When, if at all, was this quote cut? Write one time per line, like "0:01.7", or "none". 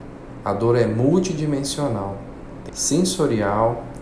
0:02.7